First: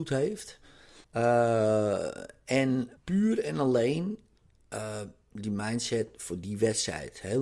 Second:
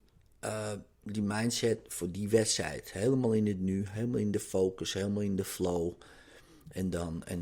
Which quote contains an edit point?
first; 2 cuts; at 1.0 s, 3.0 s

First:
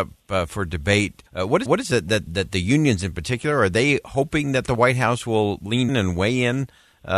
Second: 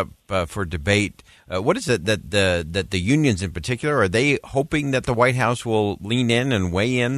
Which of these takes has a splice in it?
first; 4 cuts; at 1.3 s, 1.7 s, 2.3 s, 5.9 s

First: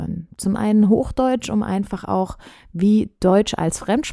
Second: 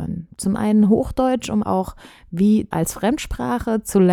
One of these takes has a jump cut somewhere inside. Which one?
second; 2 cuts; at 1.6 s, 2.7 s

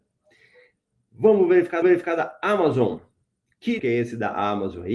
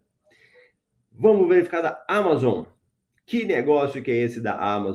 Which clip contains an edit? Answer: first; 2 cuts; at 1.8 s, 3.8 s

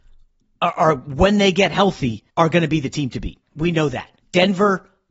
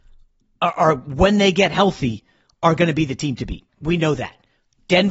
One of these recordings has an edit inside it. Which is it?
first; 2 cuts; at 2.3 s, 4.2 s

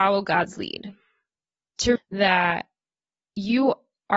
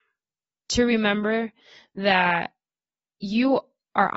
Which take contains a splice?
first; 1 cut; at 2.0 s

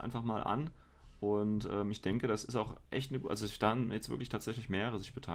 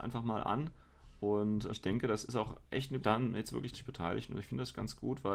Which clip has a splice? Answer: second; 3 cuts; at 1.7 s, 3.0 s, 3.7 s

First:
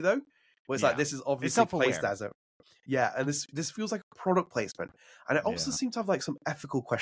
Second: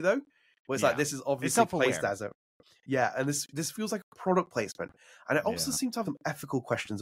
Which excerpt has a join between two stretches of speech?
second; 1 cut; at 6.0 s

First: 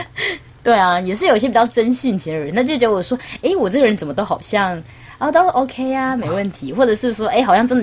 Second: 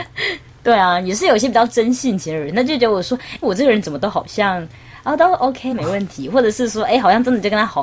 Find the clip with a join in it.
second; 2 cuts; at 3.4 s, 5.7 s

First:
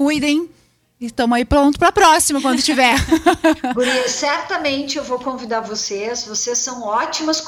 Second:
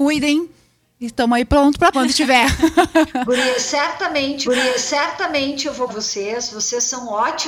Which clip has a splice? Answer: second; 3 cuts; at 1.9 s, 4.4 s, 5.9 s

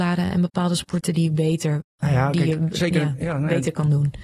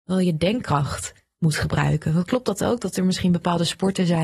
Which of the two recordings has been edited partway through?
first; 1 cut; at 1.9 s

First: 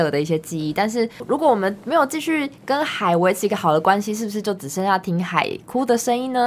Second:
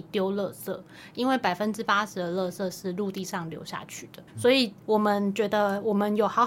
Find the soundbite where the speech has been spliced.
second; 2 cuts; at 4.3 s, 4.8 s

